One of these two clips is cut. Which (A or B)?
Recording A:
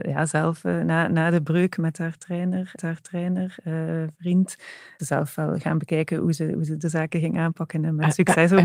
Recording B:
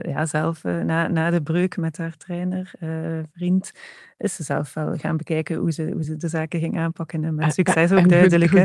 A